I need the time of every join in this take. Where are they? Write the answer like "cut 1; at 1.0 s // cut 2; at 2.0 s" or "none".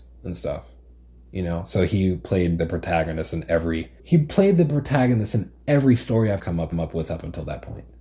cut 1; at 2.6 s // cut 2; at 4.0 s // cut 3; at 6.4 s // cut 4; at 6.7 s